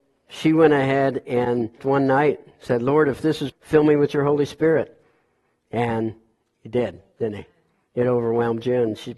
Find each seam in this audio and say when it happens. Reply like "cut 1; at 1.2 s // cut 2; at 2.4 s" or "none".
cut 1; at 1.8 s // cut 2; at 3.5 s